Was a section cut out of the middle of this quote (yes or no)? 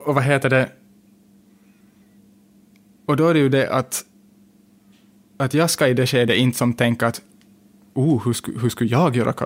no